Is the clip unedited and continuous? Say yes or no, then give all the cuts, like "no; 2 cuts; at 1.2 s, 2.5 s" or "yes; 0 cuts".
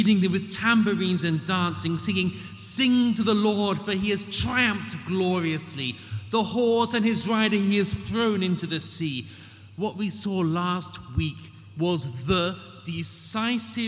yes; 0 cuts